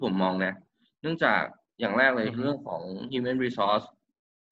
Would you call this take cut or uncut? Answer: uncut